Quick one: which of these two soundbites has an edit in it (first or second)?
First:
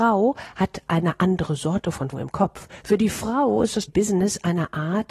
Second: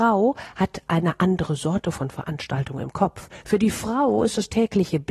first